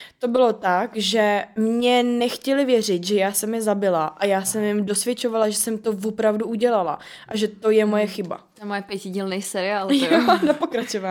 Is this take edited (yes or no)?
no